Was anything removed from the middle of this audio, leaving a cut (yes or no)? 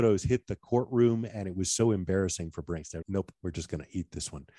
yes